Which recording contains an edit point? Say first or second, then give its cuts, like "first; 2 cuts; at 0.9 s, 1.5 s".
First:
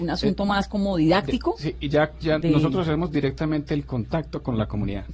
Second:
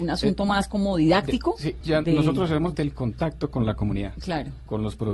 second; 2 cuts; at 1.8 s, 2.7 s